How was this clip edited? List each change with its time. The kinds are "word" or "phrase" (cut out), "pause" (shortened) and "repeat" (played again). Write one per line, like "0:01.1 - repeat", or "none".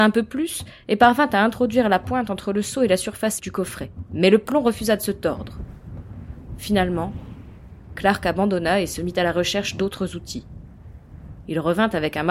0:03.4 - word